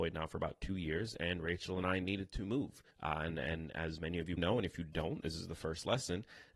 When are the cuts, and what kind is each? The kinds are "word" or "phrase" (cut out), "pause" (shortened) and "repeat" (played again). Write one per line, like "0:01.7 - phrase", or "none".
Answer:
0:02.9 - pause
0:04.4 - word